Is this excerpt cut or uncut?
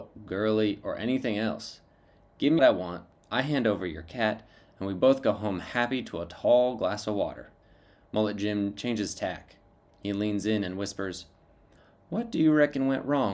cut